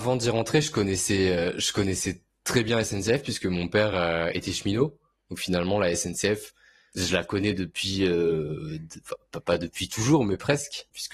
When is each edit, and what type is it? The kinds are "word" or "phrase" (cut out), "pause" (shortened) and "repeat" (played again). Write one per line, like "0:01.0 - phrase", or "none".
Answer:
none